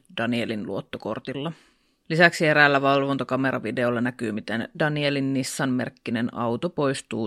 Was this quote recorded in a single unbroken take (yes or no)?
yes